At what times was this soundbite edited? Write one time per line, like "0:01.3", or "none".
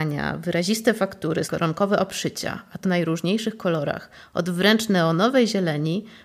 0:01.4
0:02.8